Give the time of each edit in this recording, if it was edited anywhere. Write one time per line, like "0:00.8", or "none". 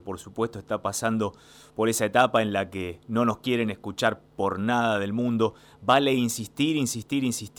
none